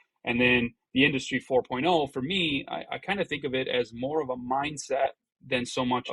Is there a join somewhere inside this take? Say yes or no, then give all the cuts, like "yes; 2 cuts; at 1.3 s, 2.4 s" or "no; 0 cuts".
no; 0 cuts